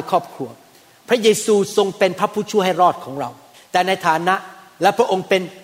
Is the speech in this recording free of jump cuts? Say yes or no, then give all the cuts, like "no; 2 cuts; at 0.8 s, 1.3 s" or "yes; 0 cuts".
no; 1 cut; at 3.5 s